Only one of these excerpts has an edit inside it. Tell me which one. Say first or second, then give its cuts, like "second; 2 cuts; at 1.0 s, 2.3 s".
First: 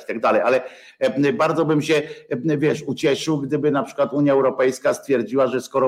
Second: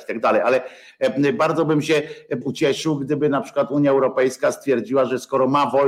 second; 1 cut; at 2.4 s